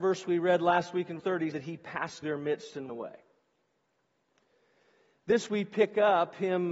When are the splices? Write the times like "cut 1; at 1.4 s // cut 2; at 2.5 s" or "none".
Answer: cut 1; at 1.2 s // cut 2; at 1.5 s // cut 3; at 2.2 s // cut 4; at 2.9 s // cut 5; at 5.5 s